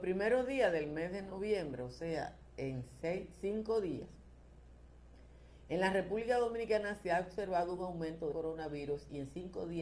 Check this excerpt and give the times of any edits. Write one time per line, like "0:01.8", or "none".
0:08.3

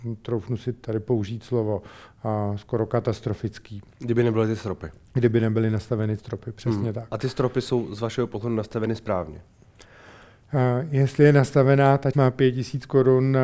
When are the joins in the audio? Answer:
0:06.2
0:12.1

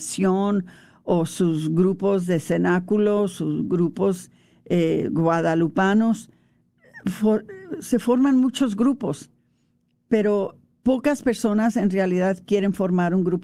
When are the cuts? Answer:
none

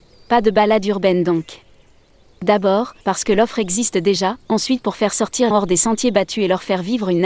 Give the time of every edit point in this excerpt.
0:03.0
0:04.4
0:05.5

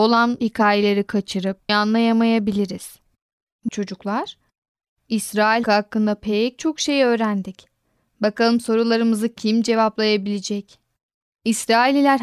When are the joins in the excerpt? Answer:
0:01.7
0:03.7
0:05.6

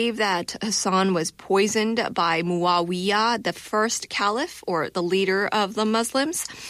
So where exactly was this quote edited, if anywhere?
none

